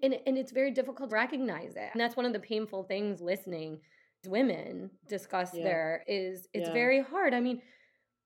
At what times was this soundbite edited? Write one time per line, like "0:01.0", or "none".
0:01.1
0:01.9
0:03.2
0:04.2
0:06.0